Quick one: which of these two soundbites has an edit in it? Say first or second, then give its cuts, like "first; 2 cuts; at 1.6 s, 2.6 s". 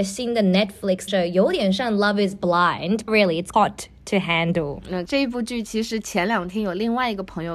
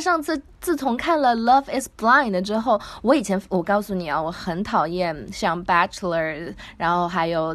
first; 4 cuts; at 1.1 s, 3.1 s, 3.5 s, 5.1 s